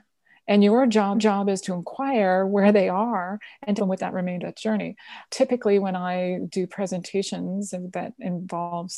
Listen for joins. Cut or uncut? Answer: cut